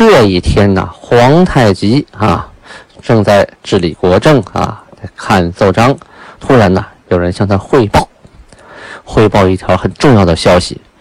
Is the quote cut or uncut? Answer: cut